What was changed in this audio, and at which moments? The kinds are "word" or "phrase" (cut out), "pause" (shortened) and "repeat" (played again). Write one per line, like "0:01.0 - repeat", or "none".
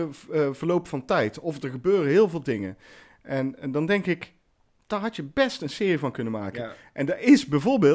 none